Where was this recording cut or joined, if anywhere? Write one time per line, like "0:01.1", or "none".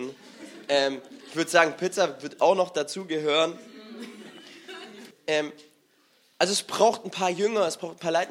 0:05.1